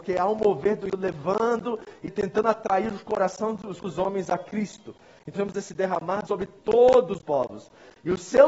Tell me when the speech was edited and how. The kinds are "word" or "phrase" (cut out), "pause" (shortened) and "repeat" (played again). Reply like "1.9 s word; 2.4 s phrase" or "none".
0.9 s word; 2.1 s word; 3.8 s word; 5.3 s word; 6.3 s word; 7.2 s word